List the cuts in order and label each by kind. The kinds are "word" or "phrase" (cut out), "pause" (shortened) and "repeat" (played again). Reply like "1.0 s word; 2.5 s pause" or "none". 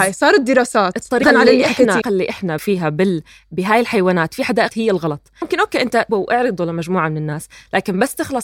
1.2 s word; 2.0 s word; 2.6 s word; 4.7 s word; 5.4 s word; 6.1 s word